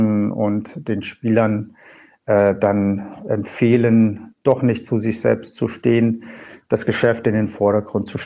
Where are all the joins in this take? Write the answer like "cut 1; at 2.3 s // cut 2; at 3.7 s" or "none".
none